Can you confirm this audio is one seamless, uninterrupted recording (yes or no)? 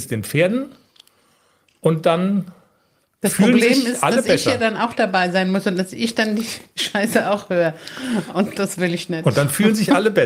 yes